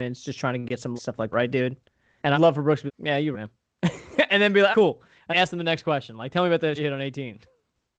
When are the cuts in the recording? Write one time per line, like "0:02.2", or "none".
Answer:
0:01.0
0:01.3
0:02.3
0:02.9
0:03.3
0:04.7
0:05.3
0:06.8